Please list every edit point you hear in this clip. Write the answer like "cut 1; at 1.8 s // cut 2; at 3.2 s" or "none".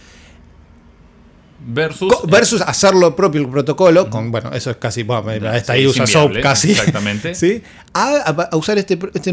cut 1; at 7.9 s